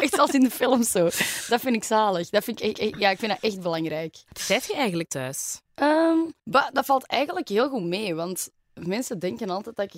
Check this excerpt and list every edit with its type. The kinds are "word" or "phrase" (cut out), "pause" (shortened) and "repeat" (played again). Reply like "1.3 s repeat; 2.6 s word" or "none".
2.7 s repeat; 4.3 s pause; 5.0 s word; 5.7 s pause; 6.4 s pause